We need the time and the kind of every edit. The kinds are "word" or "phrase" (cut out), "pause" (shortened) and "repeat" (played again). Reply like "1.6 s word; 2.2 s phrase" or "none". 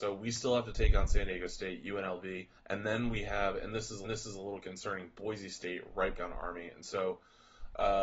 2.6 s pause; 4.0 s repeat; 6.2 s phrase